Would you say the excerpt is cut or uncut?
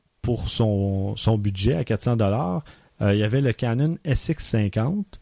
uncut